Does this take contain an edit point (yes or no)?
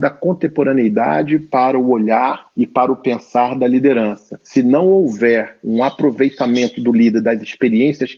no